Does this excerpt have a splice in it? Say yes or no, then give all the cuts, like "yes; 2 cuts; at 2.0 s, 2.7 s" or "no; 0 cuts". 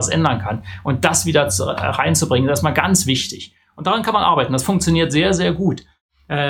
no; 0 cuts